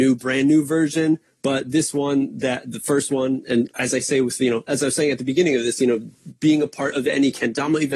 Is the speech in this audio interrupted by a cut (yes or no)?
no